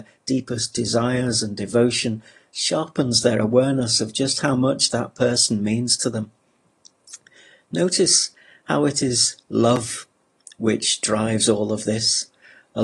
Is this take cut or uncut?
uncut